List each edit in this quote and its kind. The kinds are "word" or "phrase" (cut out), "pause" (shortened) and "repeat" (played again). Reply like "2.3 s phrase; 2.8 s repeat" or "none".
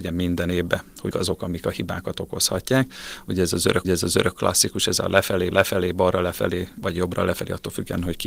1.1 s word; 3.8 s repeat; 5.5 s repeat